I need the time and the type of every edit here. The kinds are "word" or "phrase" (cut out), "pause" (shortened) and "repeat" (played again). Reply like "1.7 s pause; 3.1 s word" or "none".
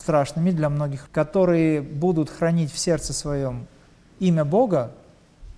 1.1 s phrase